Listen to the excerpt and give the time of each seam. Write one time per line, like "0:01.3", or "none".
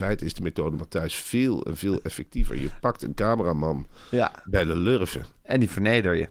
none